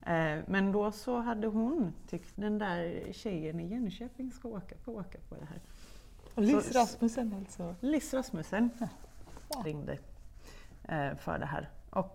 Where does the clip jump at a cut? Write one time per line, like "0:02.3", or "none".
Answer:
0:02.3
0:04.8
0:09.6